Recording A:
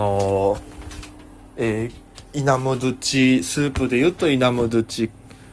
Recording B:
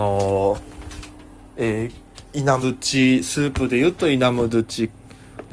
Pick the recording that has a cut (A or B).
B